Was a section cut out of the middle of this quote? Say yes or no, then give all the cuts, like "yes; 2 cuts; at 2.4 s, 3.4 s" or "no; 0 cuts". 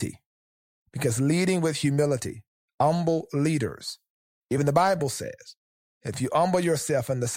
no; 0 cuts